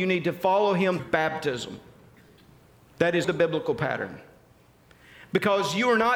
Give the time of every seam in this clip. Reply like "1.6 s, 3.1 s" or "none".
1.0 s, 3.2 s